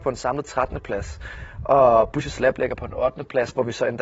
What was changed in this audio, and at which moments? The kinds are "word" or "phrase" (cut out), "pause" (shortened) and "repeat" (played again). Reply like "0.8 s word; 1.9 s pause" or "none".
none